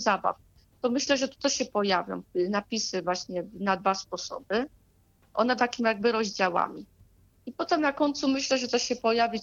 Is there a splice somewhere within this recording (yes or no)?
yes